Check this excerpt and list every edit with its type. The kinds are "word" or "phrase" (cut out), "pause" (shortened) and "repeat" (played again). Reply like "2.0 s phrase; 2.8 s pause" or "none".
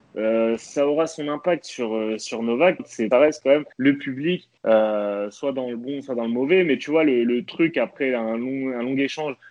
2.8 s phrase; 3.1 s phrase; 3.7 s pause; 4.6 s pause